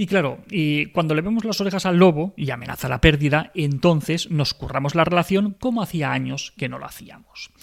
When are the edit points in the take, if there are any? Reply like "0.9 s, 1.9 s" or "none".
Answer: none